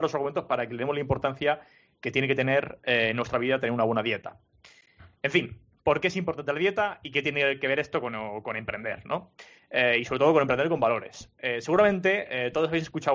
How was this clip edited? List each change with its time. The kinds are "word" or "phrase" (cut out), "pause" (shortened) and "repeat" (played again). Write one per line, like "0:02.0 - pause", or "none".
none